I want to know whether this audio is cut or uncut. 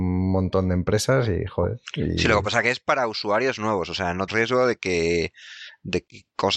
cut